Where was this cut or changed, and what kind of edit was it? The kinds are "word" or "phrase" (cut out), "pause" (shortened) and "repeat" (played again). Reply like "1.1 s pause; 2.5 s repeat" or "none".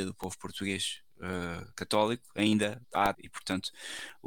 1.7 s pause; 2.8 s pause; 3.1 s phrase

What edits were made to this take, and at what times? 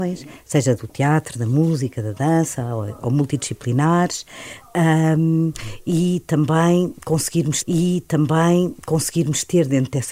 7.6 s repeat

